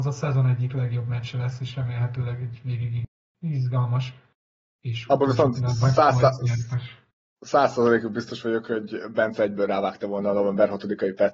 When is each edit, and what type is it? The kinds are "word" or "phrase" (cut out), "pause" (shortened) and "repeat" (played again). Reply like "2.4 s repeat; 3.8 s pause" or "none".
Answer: none